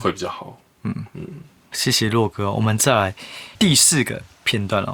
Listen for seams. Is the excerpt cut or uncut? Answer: cut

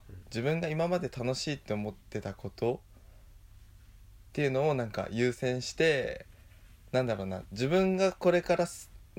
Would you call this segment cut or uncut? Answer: uncut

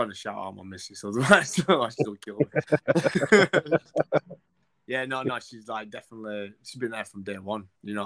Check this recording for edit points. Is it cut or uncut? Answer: uncut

